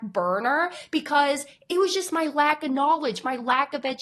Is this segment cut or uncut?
uncut